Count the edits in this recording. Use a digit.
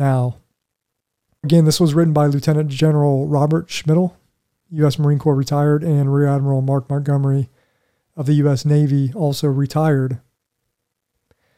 1